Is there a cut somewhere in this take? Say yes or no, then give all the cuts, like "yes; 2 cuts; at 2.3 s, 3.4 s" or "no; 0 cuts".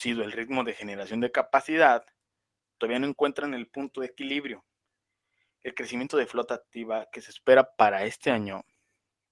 no; 0 cuts